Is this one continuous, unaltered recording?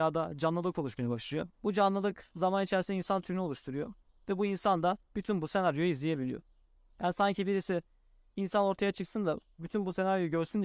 no; 1 cut; at 1.5 s

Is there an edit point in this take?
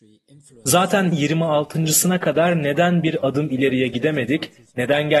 yes; 1 cut; at 1.1 s

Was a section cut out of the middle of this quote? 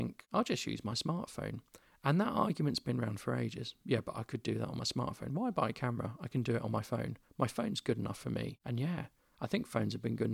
no; 0 cuts

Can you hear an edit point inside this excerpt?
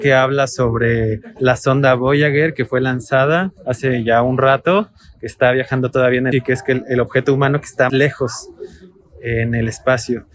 yes; 3 cuts; at 3.6 s, 6.3 s, 7.9 s

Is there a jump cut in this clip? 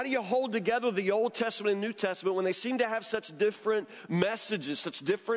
no; 0 cuts

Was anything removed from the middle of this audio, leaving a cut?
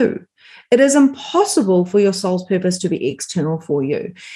no; 0 cuts

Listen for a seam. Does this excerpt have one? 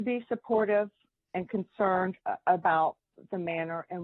no; 0 cuts

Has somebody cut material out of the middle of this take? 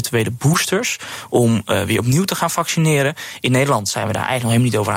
no; 0 cuts

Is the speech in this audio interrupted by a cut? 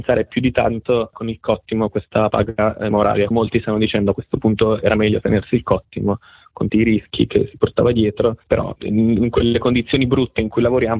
yes; 4 cuts; at 2.9 s, 3.3 s, 6.7 s, 8.8 s

